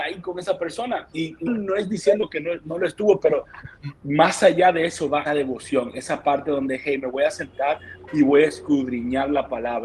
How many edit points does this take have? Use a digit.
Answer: 2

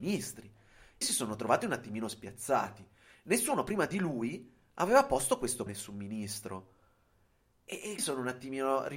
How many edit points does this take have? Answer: 3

